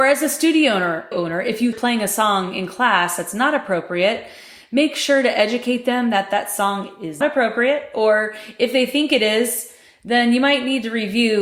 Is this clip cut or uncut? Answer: cut